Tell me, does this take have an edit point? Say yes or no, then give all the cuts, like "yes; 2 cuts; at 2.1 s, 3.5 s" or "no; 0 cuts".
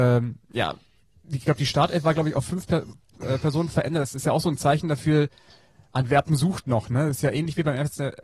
no; 0 cuts